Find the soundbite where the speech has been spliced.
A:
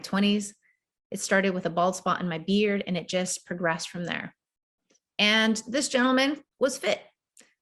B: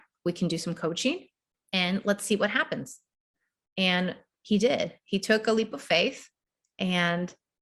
A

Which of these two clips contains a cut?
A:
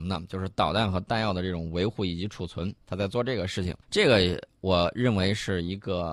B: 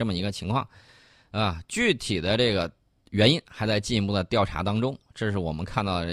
A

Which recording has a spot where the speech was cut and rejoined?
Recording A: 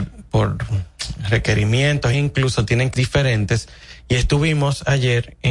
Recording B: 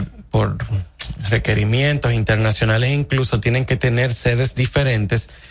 A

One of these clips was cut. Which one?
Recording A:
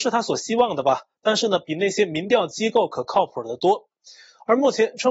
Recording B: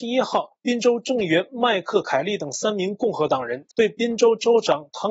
B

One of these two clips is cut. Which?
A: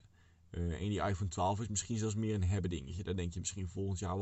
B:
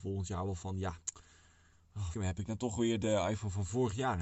B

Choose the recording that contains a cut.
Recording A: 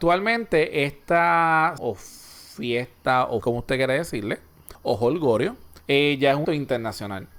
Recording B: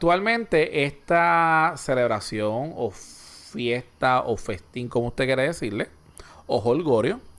A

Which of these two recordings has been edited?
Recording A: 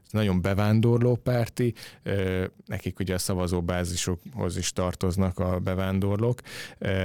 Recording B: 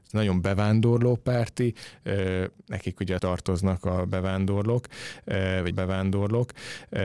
B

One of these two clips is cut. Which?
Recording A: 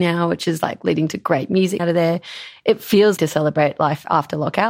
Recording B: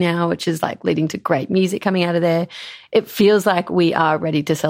A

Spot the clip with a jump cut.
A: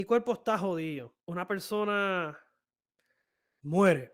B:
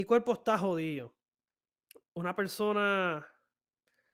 A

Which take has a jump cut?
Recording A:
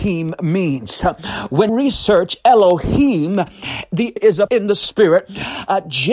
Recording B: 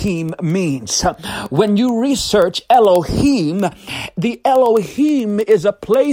A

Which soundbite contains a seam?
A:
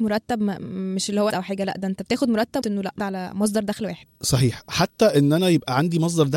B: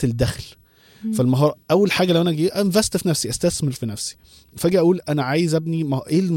A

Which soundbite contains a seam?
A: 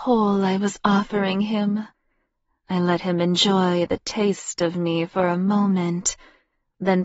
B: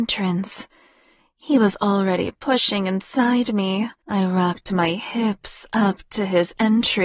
B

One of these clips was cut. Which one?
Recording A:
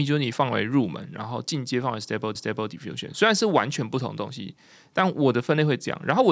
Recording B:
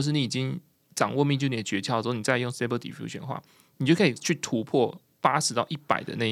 A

